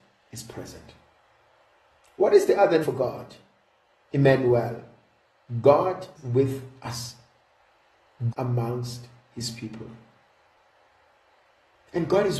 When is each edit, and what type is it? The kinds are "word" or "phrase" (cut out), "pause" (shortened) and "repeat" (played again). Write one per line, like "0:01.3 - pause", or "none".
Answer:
0:02.8 - word
0:06.2 - word
0:08.3 - word